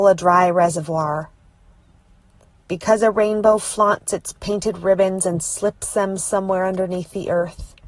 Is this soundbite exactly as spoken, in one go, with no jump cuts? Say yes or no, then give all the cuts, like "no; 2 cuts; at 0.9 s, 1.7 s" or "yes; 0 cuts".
yes; 0 cuts